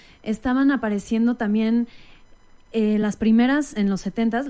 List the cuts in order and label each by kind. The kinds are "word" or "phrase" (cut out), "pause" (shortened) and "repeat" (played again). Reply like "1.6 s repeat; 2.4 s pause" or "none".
none